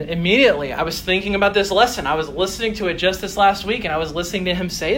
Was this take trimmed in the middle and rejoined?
no; 0 cuts

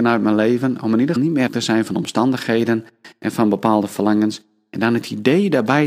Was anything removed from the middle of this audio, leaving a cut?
yes; 2 cuts; at 1.2 s, 1.5 s

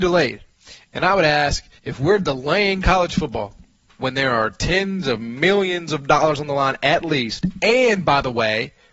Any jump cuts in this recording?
yes; 1 cut; at 1.8 s

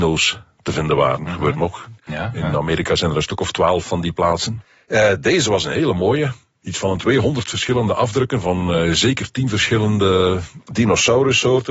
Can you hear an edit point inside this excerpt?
no; 0 cuts

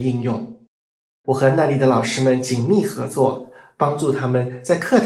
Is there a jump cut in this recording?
no; 0 cuts

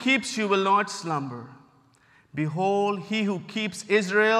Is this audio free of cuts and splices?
yes; 0 cuts

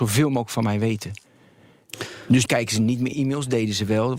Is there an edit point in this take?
yes; 2 cuts; at 2.5 s, 3.1 s

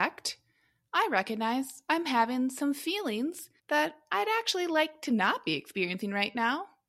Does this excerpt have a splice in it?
yes; 1 cut; at 3.6 s

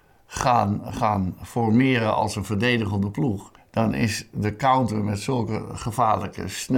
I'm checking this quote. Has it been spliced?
yes; 1 cut; at 3.6 s

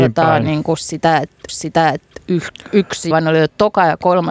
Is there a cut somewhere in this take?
yes; 2 cuts; at 1.5 s, 3.1 s

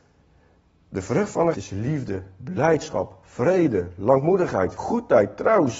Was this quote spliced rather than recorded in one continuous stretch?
yes; 2 cuts; at 1.5 s, 4.8 s

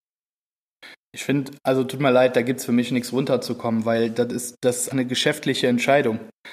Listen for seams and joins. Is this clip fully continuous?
no; 1 cut; at 4.9 s

